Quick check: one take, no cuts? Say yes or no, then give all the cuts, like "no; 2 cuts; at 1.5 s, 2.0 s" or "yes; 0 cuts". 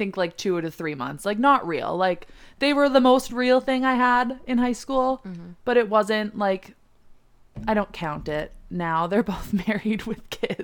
yes; 0 cuts